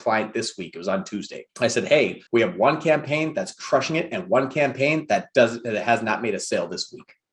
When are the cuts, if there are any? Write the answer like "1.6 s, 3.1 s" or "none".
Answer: 1.5 s, 2.3 s